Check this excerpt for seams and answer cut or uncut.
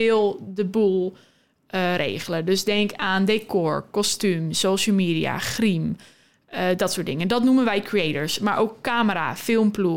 uncut